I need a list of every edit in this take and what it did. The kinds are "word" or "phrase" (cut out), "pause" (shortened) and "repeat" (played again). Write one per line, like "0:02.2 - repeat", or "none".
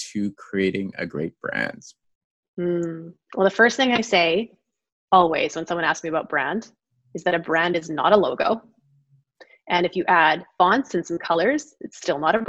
none